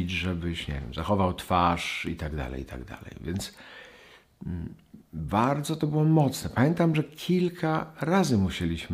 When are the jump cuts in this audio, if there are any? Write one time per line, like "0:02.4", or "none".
0:05.1